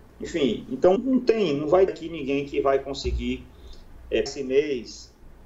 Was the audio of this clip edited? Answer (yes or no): yes